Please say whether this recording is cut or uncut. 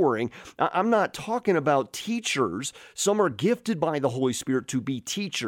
uncut